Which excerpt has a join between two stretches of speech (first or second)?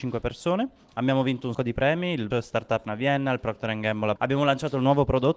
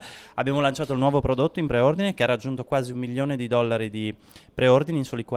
first